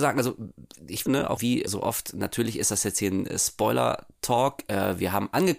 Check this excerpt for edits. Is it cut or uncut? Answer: cut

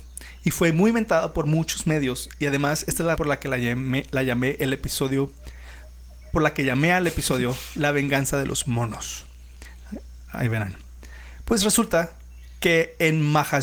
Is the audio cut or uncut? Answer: cut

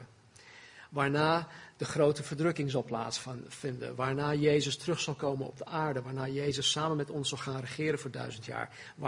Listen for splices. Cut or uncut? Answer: uncut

